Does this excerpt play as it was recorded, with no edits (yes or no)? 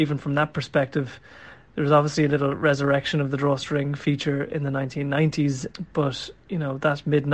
yes